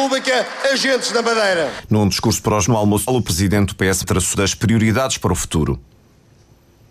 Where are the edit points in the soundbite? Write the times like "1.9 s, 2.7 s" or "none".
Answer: 2.7 s, 3.1 s, 4.0 s, 4.3 s